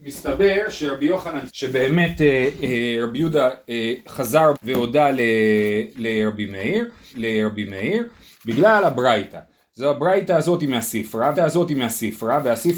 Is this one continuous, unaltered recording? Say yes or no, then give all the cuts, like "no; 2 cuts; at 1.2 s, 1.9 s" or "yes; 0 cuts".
no; 4 cuts; at 1.5 s, 4.5 s, 7.1 s, 11.3 s